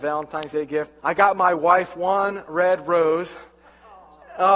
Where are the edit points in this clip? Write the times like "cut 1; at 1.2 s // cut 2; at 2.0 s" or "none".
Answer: cut 1; at 1.0 s